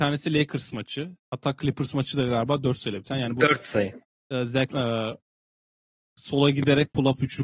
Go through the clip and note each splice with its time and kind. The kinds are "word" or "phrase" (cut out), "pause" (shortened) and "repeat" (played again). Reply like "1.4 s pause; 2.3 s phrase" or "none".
4.7 s word